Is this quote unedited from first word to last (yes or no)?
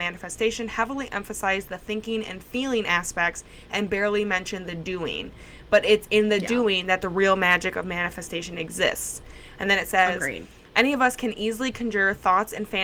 yes